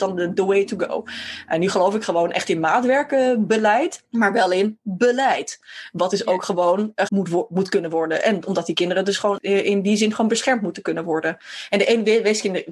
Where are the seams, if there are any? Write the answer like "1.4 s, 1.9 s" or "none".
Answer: 7.1 s